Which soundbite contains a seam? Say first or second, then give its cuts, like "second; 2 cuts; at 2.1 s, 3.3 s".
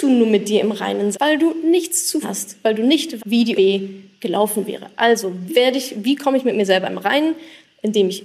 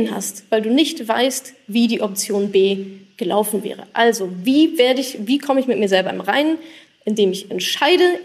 first; 5 cuts; at 1.1 s, 2.2 s, 3.2 s, 3.6 s, 5.5 s